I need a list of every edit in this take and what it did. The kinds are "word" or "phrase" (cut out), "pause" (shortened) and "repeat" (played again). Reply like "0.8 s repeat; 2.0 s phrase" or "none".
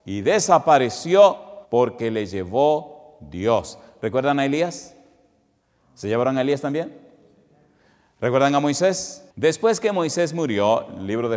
1.6 s pause; 9.3 s pause